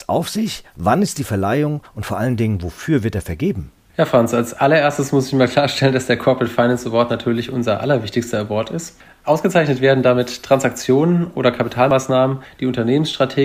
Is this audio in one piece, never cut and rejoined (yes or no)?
yes